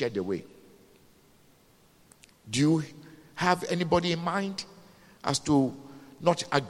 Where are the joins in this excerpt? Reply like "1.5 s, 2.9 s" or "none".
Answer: none